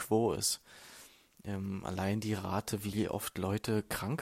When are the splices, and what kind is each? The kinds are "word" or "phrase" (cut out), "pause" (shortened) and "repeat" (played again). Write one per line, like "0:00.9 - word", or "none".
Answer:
none